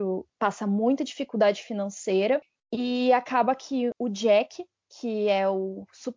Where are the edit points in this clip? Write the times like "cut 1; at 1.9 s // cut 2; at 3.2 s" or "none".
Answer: none